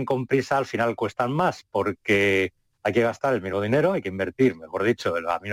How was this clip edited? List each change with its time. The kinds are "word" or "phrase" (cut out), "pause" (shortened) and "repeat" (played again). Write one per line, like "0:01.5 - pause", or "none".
none